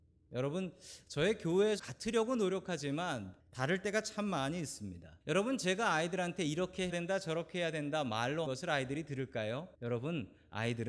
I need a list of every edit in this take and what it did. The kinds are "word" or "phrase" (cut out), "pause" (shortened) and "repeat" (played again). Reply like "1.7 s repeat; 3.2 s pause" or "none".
1.8 s word; 3.4 s pause; 5.2 s pause; 6.9 s word; 8.5 s word; 9.7 s pause